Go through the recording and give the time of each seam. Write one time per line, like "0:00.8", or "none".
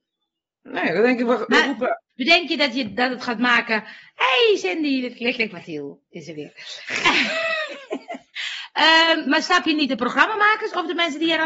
0:02.1